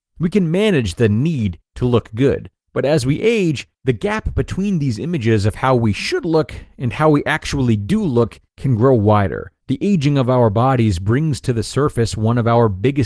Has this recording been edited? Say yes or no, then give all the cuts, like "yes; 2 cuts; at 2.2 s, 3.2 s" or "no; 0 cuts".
yes; 4 cuts; at 2.6 s, 3.7 s, 8.5 s, 9.6 s